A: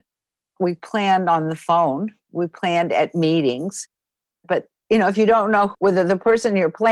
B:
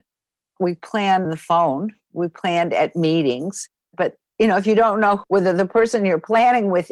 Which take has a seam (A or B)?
B